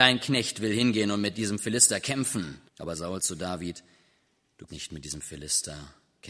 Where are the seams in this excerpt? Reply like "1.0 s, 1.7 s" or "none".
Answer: 2.7 s, 3.2 s, 4.7 s